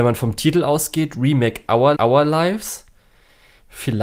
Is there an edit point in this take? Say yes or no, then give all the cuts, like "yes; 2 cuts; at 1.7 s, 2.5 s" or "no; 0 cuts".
yes; 1 cut; at 1.9 s